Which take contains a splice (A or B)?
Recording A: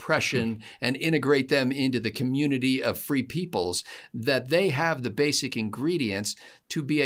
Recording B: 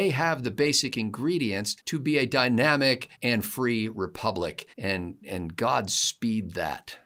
B